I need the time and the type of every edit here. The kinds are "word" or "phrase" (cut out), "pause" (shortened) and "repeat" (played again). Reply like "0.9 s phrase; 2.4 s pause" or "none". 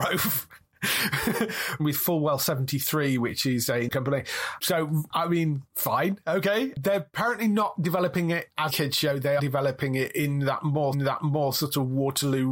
1.8 s phrase; 3.9 s word; 8.7 s word; 9.4 s word; 10.9 s repeat